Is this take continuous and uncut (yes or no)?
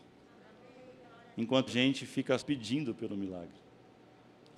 no